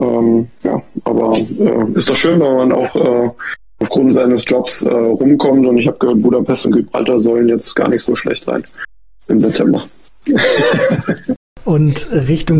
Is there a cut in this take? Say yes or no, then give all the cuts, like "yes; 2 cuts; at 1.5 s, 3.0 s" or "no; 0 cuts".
no; 0 cuts